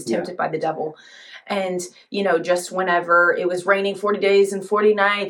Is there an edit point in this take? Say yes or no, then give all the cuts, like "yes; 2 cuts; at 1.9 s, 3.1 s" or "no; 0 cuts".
no; 0 cuts